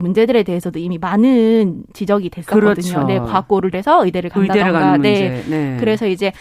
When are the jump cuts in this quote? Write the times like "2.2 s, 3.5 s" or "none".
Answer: 3.7 s